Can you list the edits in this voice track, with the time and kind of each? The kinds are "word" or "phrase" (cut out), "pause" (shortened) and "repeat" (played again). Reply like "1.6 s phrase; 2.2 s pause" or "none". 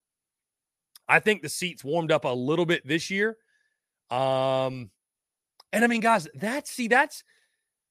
none

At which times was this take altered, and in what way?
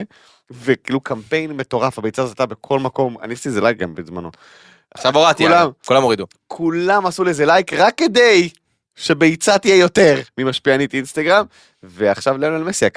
none

